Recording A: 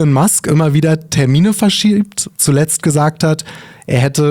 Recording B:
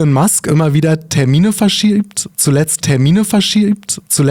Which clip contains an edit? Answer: B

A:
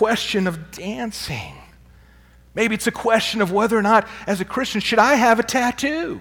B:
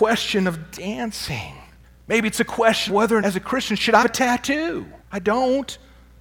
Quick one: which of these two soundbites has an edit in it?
B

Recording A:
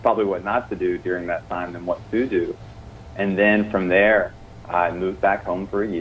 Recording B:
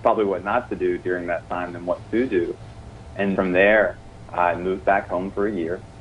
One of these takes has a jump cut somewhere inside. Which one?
B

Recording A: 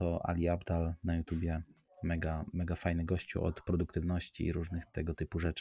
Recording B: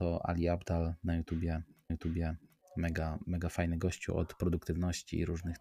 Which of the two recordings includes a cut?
B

